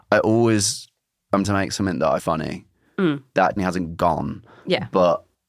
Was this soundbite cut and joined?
yes; 3 cuts; at 1.4 s, 2.2 s, 3.6 s

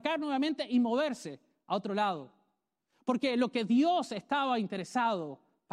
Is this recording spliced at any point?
no; 0 cuts

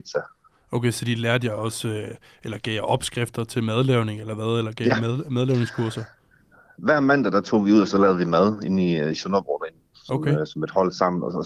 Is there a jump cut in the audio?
no; 0 cuts

